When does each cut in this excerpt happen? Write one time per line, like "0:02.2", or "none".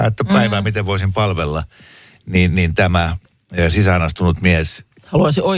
none